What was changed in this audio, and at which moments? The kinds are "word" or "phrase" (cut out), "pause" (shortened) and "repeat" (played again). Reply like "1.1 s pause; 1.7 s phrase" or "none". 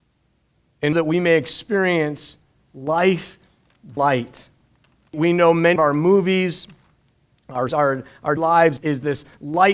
0.9 s word; 4.0 s word; 5.1 s word; 5.8 s word; 7.7 s word; 8.4 s word; 8.8 s word